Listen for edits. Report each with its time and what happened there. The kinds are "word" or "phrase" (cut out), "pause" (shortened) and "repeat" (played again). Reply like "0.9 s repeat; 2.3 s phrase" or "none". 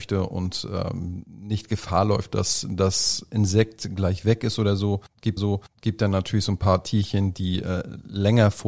5.4 s repeat

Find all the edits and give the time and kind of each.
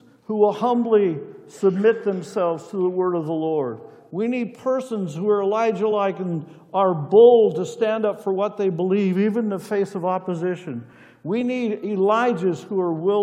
none

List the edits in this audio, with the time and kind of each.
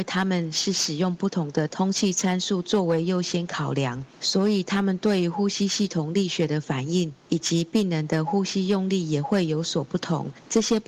4.1 s pause

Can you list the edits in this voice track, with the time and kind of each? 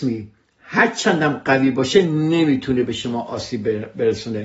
none

